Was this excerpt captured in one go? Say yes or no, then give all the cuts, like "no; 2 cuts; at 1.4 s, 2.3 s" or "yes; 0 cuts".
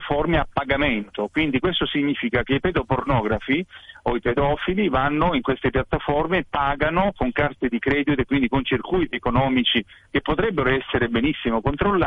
yes; 0 cuts